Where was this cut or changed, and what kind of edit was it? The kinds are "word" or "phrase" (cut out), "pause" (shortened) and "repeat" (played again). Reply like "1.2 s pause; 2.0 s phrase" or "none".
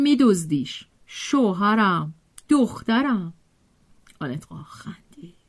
0.9 s pause; 4.5 s word